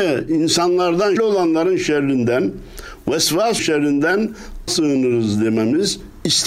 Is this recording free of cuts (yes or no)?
no